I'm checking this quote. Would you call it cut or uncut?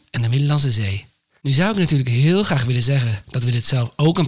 uncut